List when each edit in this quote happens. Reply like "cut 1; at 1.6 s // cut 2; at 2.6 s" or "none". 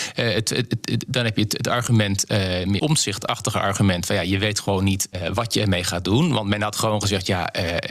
cut 1; at 2.8 s